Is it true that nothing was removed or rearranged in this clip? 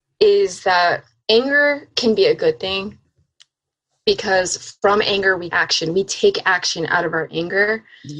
no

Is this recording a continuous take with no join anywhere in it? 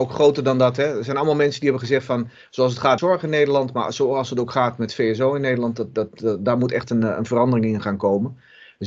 no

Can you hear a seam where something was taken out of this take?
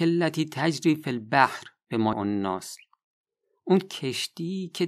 yes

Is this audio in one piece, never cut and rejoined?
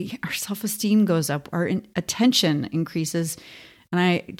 yes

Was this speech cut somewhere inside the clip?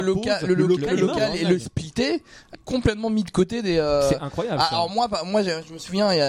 yes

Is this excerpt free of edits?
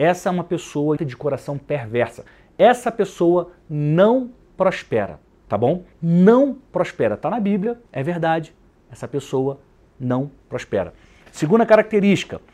no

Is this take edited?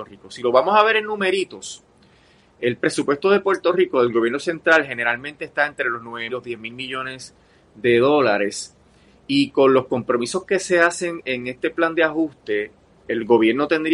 yes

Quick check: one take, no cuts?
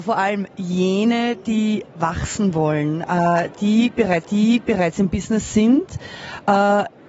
no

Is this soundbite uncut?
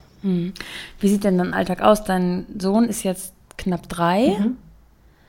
yes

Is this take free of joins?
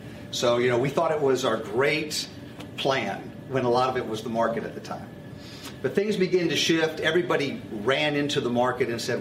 yes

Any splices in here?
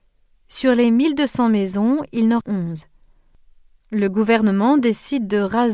yes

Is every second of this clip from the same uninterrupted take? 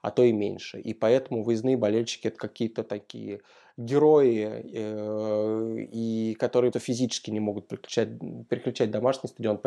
no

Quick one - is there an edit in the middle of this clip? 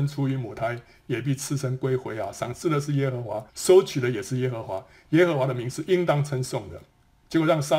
yes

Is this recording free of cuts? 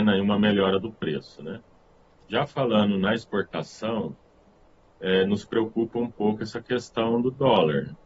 yes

